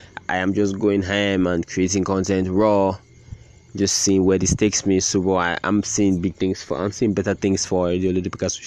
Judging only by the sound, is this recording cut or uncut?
uncut